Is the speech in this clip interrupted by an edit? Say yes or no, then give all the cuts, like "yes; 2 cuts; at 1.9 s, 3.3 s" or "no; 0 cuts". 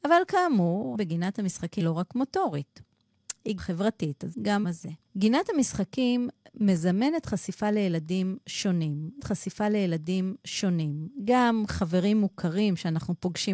yes; 7 cuts; at 0.9 s, 1.8 s, 3.6 s, 4.3 s, 4.6 s, 5.1 s, 9.2 s